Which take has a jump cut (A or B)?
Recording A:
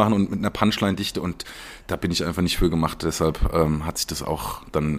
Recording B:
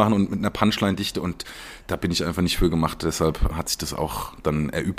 B